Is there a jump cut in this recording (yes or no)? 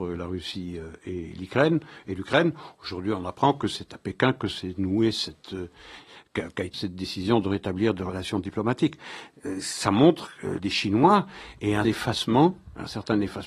yes